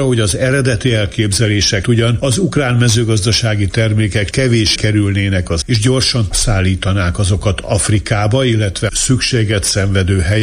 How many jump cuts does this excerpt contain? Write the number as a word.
six